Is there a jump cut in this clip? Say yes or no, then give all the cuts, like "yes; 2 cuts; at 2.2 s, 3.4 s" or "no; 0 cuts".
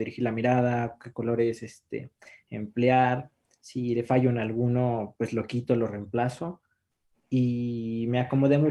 no; 0 cuts